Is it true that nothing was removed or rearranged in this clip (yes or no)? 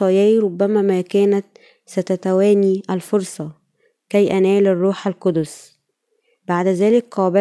yes